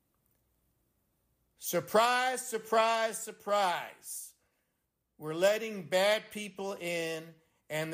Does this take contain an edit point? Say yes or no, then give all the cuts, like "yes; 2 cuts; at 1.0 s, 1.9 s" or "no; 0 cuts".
no; 0 cuts